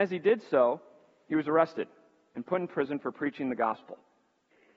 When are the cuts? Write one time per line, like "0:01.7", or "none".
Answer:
none